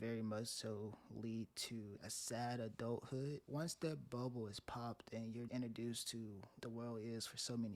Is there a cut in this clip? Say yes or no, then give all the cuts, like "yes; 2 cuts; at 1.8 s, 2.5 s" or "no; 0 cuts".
yes; 4 cuts; at 2.0 s, 3.4 s, 5.5 s, 6.6 s